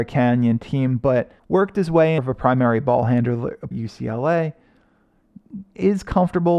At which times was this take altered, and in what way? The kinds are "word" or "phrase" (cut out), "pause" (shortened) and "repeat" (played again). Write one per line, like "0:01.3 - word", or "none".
0:01.4 - pause
0:02.2 - phrase
0:03.7 - phrase